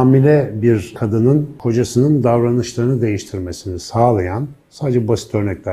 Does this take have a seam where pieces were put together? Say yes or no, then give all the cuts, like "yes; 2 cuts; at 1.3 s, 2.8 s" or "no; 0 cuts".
no; 0 cuts